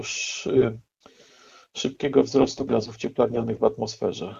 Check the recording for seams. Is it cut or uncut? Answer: cut